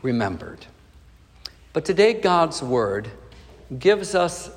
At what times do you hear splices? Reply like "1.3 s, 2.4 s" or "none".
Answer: 1.6 s